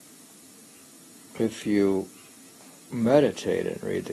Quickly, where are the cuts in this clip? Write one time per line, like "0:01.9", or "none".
0:02.3